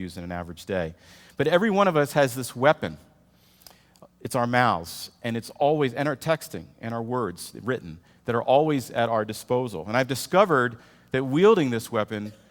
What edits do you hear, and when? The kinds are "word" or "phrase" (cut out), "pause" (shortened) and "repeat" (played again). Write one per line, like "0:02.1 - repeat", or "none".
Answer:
none